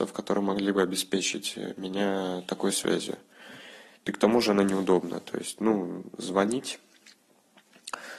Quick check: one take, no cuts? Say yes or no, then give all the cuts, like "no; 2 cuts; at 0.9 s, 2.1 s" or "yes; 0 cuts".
yes; 0 cuts